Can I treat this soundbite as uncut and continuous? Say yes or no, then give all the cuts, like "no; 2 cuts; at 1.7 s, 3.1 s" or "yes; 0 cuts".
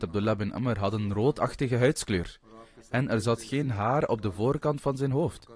yes; 0 cuts